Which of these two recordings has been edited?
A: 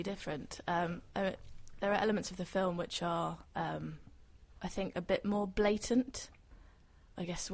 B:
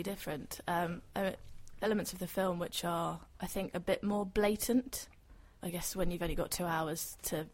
B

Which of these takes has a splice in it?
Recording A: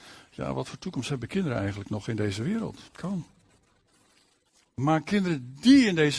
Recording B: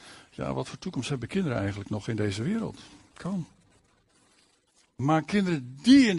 A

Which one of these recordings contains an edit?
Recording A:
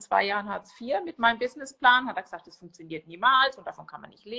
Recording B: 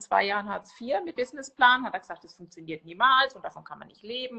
B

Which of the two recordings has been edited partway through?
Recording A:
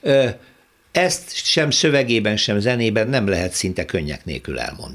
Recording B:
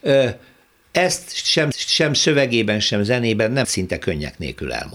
B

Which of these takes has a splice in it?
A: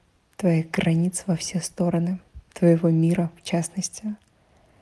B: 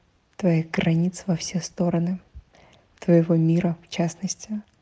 A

